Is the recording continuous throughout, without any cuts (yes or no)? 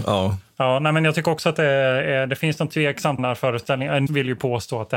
no